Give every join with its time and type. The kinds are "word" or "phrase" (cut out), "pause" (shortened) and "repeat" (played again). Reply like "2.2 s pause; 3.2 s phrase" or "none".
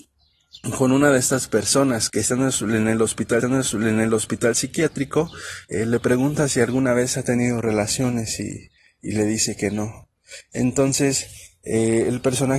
2.1 s word; 3.4 s repeat; 8.8 s pause